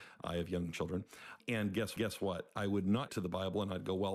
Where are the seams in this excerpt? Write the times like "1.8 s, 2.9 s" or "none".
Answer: 1.4 s, 2.0 s, 3.1 s